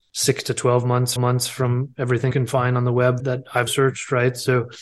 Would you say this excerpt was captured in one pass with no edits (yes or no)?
no